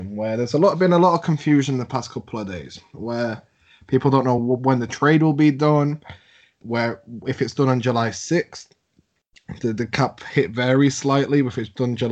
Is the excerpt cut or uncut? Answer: uncut